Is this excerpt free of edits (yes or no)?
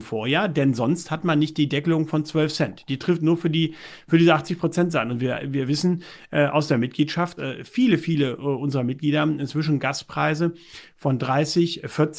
no